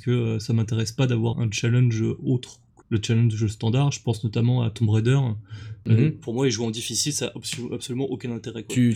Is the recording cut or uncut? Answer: cut